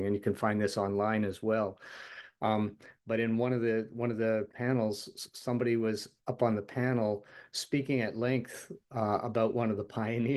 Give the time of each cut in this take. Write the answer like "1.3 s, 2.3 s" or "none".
6.2 s